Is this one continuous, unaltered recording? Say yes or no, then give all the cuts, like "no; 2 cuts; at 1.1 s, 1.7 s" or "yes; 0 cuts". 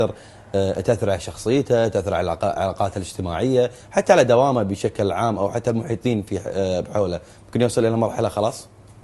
yes; 0 cuts